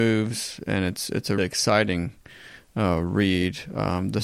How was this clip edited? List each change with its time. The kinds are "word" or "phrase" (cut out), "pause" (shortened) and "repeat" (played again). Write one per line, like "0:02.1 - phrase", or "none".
0:01.4 - word